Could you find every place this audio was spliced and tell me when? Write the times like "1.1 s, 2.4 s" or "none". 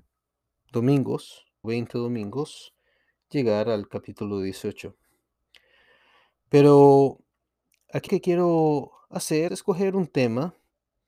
1.6 s, 8.1 s, 9.5 s